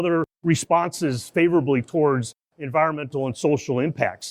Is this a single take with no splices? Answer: yes; 0 cuts

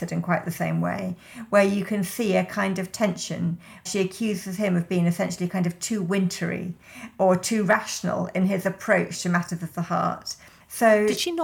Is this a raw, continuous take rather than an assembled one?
no; 1 cut; at 3.9 s

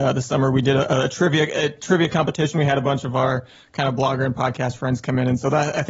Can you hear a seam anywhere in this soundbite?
no; 0 cuts

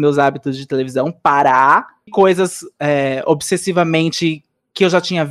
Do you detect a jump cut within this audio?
yes; 1 cut; at 2.1 s

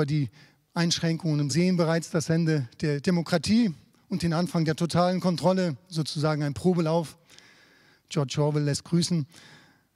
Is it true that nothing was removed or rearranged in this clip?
no; 1 cut; at 1.5 s

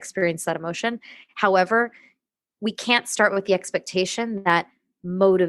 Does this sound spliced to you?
no; 0 cuts

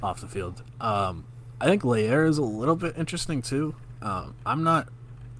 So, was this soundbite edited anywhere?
no; 0 cuts

